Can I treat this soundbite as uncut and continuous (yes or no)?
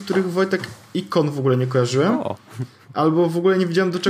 yes